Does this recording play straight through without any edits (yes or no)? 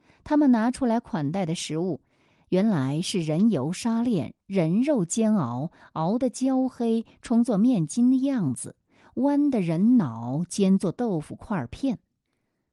yes